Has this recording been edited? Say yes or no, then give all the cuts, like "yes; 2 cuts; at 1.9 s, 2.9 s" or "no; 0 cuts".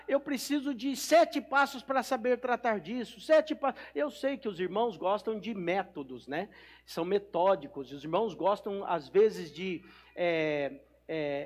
no; 0 cuts